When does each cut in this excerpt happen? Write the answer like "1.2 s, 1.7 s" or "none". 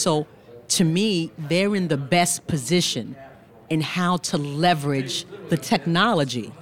none